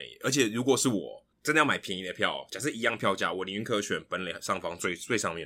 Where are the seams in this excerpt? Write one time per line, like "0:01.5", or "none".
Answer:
0:01.3